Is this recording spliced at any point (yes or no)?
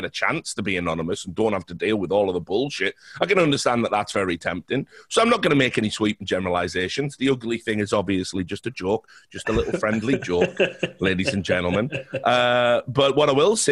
no